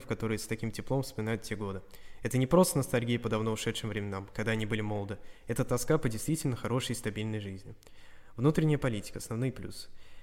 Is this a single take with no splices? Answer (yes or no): yes